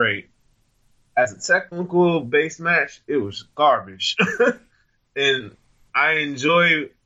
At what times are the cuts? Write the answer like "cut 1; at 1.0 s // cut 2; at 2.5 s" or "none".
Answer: none